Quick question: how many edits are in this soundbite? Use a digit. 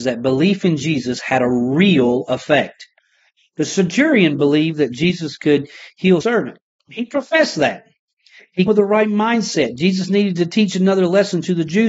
2